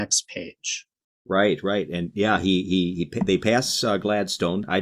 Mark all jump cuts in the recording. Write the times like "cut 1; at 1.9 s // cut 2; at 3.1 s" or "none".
none